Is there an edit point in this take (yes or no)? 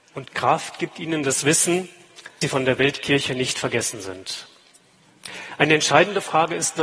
yes